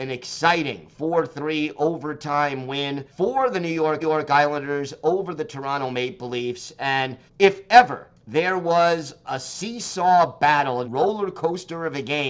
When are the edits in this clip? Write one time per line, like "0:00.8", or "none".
0:03.1
0:04.0
0:07.3
0:08.2
0:09.2
0:10.8